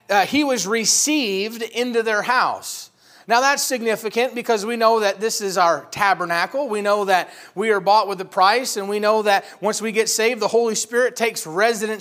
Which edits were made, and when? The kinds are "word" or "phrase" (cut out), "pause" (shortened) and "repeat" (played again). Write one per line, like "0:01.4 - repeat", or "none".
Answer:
none